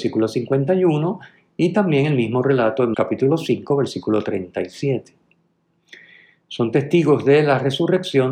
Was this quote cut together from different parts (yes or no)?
yes